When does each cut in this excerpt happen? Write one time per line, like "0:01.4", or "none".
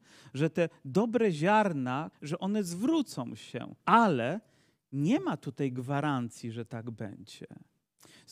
0:02.1
0:03.8